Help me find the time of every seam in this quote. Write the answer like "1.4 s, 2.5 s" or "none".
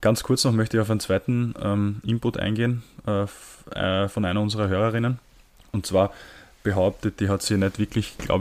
5.5 s, 7.2 s